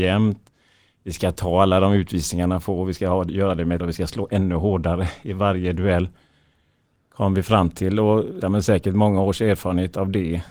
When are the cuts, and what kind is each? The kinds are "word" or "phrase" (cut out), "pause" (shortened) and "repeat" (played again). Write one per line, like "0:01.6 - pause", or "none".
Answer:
0:03.8 - word
0:08.4 - word